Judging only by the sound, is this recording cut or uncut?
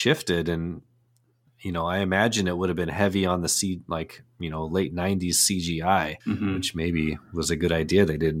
cut